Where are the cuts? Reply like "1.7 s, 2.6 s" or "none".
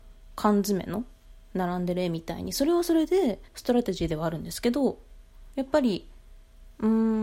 3.5 s

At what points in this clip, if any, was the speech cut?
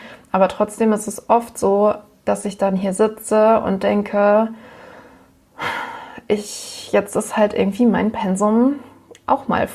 none

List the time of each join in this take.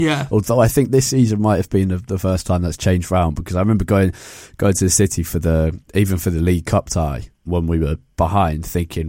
5.8 s, 7.3 s

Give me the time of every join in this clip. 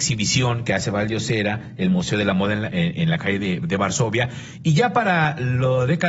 none

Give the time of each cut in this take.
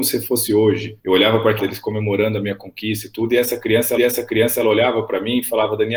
1.0 s, 1.6 s, 4.0 s

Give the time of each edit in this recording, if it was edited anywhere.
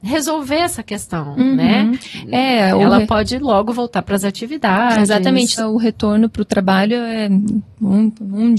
5.6 s

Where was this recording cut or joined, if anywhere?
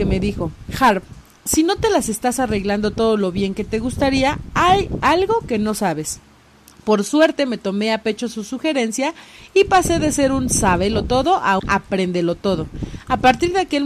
11.6 s

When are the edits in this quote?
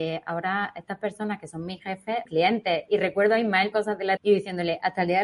2.3 s, 3.7 s, 4.2 s

